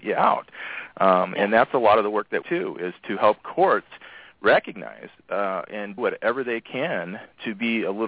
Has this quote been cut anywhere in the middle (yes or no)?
yes